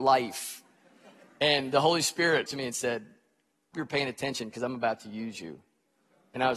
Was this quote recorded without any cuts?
no; 2 cuts; at 2.5 s, 3.7 s

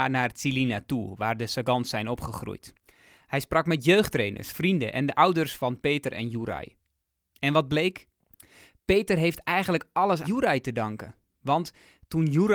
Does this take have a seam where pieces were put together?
yes; 1 cut; at 10.2 s

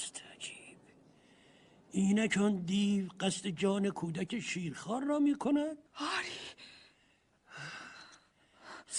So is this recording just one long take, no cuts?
no; 1 cut; at 5.9 s

